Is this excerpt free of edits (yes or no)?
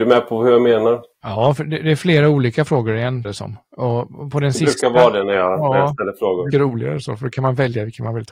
no